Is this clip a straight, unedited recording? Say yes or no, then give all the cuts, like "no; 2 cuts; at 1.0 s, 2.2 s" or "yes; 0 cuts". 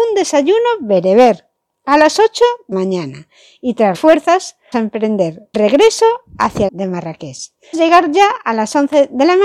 no; 6 cuts; at 2.7 s, 3.9 s, 4.7 s, 5.5 s, 6.7 s, 7.7 s